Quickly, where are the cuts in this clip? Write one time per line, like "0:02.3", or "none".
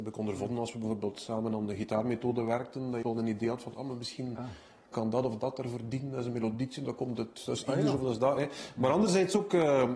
0:03.0